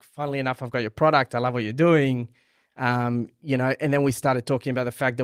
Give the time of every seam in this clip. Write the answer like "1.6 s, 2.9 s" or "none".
none